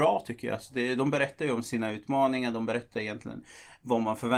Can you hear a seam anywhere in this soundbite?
no; 0 cuts

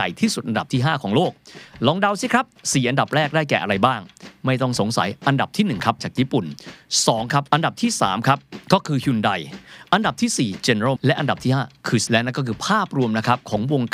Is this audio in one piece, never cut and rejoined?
no; 4 cuts; at 6.0 s, 7.5 s, 11.0 s, 12.1 s

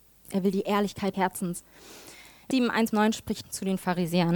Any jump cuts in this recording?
yes; 4 cuts; at 1.1 s, 2.5 s, 2.9 s, 3.4 s

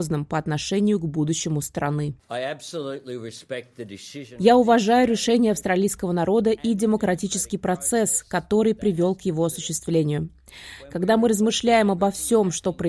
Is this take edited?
no; 0 cuts

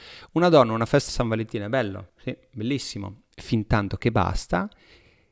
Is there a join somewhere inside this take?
yes; 3 cuts; at 1.1 s, 2.1 s, 3.3 s

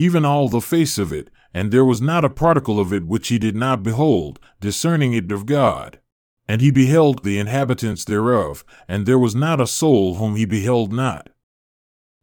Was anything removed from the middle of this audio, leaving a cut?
yes; 3 cuts; at 5.3 s, 6.2 s, 7.2 s

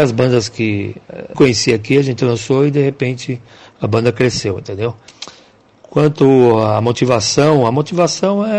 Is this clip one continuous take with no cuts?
no; 1 cut; at 1.3 s

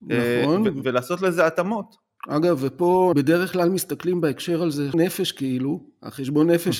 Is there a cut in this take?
yes; 3 cuts; at 2.2 s, 3.1 s, 4.9 s

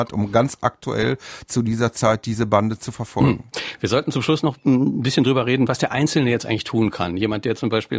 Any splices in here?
no; 0 cuts

